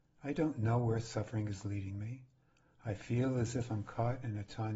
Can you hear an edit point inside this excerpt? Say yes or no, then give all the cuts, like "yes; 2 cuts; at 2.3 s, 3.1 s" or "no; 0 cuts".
no; 0 cuts